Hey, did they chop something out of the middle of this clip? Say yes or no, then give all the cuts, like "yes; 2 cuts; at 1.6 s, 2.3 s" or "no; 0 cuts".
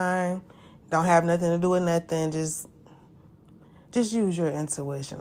no; 0 cuts